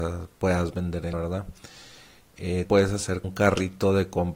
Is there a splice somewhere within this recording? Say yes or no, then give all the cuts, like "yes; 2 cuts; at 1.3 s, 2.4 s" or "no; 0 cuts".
yes; 3 cuts; at 1.1 s, 2.7 s, 3.2 s